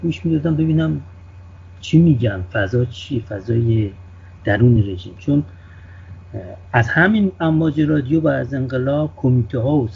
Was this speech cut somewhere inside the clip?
no; 0 cuts

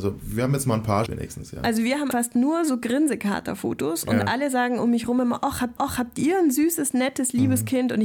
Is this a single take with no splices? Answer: no; 3 cuts; at 1.1 s, 2.1 s, 5.8 s

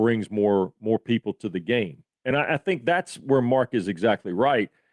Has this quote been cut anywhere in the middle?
no; 0 cuts

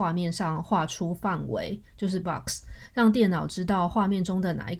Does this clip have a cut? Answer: yes; 1 cut; at 2.2 s

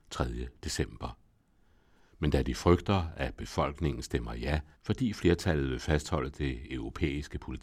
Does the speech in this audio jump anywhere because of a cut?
yes; 1 cut; at 4.7 s

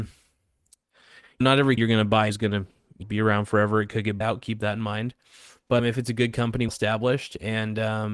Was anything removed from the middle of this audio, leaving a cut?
yes; 7 cuts; at 1.4 s, 1.8 s, 2.3 s, 3.0 s, 4.2 s, 5.8 s, 6.7 s

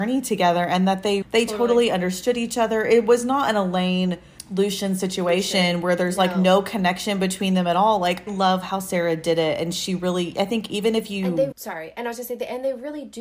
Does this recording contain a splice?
yes; 3 cuts; at 1.2 s, 8.3 s, 11.5 s

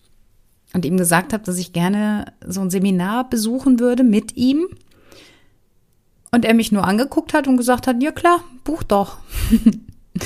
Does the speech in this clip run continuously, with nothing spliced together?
yes; 0 cuts

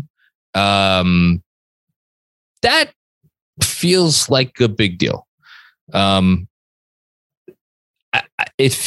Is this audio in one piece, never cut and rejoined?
yes; 0 cuts

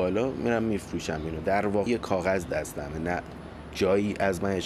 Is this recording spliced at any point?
yes; 1 cut; at 1.9 s

